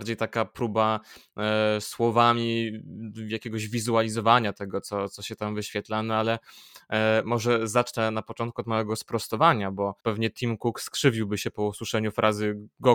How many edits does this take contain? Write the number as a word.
one